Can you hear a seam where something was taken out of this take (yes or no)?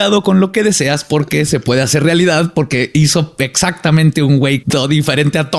yes